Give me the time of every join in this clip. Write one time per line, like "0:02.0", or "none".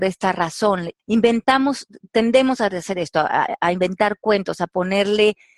0:01.0